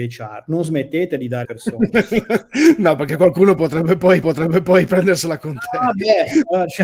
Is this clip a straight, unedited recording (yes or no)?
no